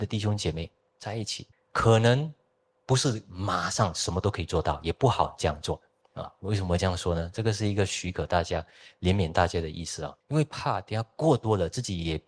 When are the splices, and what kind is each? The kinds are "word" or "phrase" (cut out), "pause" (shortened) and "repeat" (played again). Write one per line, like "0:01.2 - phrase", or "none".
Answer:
0:01.5 - pause
0:06.0 - pause
0:10.2 - pause